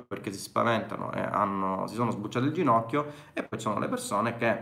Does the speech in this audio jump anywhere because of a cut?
no; 0 cuts

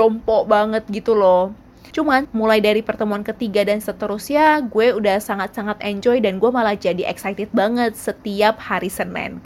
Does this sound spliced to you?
yes; 1 cut; at 2.2 s

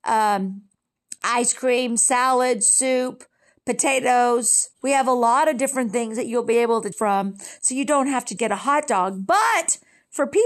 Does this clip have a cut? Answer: yes; 3 cuts; at 4.7 s, 6.9 s, 8.4 s

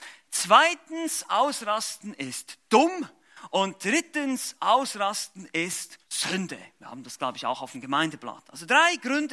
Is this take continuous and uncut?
no; 1 cut; at 6.0 s

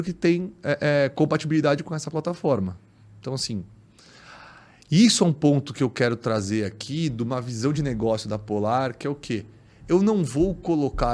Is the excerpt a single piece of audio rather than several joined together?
yes; 0 cuts

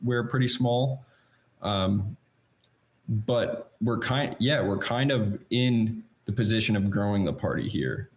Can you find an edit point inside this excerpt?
no; 0 cuts

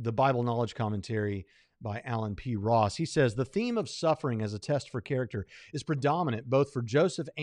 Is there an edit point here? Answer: no; 0 cuts

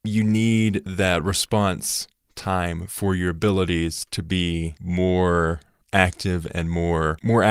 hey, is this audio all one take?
yes; 0 cuts

